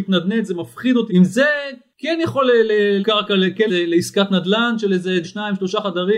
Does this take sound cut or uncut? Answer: cut